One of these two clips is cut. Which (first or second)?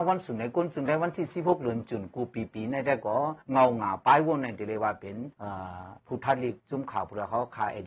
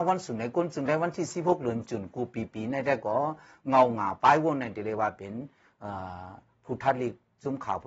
first